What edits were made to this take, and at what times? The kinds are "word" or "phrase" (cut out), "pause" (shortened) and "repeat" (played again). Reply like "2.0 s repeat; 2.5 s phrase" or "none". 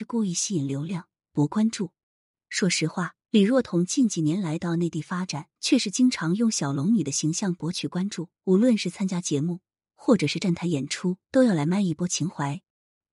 3.2 s pause; 5.6 s pause; 8.4 s pause; 11.2 s pause